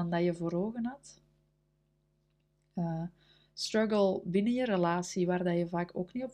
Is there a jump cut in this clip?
no; 0 cuts

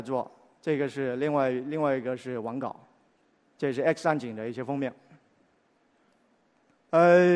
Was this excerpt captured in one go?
no; 1 cut; at 3.2 s

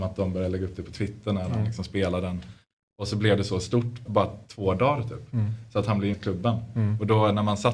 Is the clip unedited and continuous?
no; 2 cuts; at 4.1 s, 6.1 s

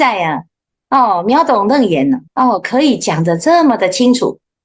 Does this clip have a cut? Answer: yes; 1 cut; at 2.3 s

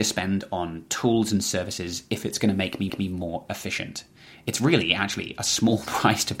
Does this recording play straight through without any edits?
no; 1 cut; at 2.9 s

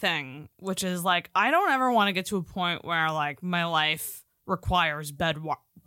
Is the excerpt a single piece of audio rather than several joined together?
yes; 0 cuts

